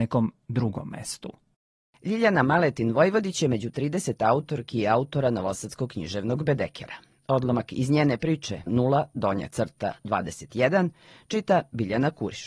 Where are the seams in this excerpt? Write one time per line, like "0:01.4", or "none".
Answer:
0:08.7